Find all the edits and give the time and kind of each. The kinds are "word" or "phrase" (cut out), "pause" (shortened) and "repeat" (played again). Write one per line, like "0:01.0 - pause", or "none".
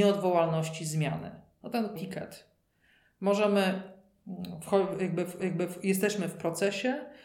0:02.0 - phrase
0:05.4 - repeat

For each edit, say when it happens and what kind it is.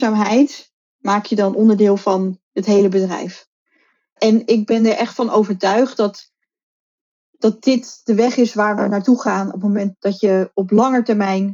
none

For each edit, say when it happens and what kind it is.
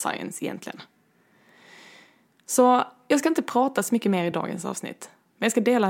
none

